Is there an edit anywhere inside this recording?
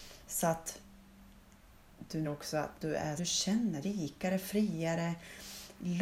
yes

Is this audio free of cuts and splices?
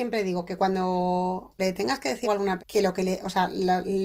no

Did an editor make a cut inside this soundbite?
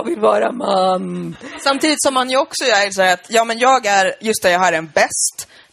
no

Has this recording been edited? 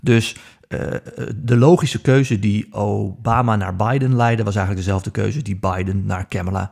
no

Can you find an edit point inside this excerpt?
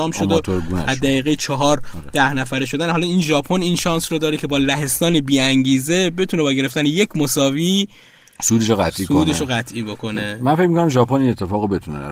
no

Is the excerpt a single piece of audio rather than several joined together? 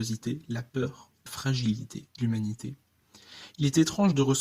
no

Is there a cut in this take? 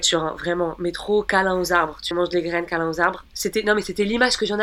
yes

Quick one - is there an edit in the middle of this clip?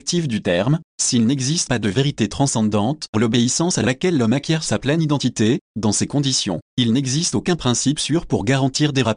yes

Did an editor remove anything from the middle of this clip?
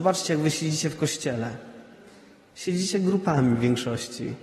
no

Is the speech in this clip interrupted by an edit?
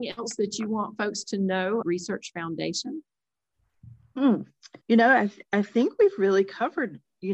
yes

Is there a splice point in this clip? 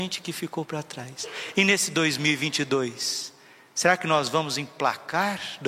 no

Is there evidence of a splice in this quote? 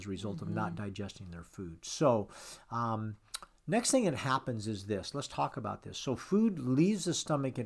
no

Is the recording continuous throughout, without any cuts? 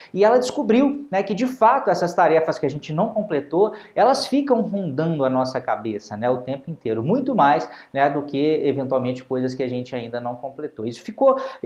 yes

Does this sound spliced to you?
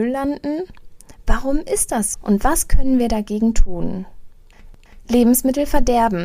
yes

